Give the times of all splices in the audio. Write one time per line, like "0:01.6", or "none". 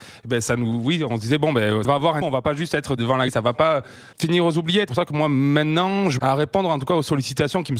0:01.8
0:02.2
0:03.0
0:03.3
0:04.9
0:06.2